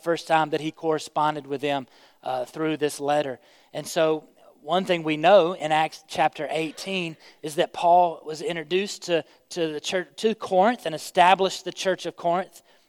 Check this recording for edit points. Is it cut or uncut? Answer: uncut